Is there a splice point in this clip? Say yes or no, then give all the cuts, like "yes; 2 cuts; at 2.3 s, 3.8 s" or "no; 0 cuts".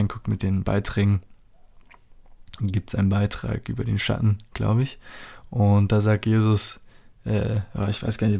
no; 0 cuts